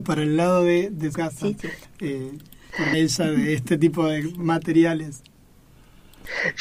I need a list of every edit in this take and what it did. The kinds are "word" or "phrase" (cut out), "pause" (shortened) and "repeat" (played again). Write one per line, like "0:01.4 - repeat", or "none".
0:01.1 - word
0:01.8 - pause
0:02.9 - phrase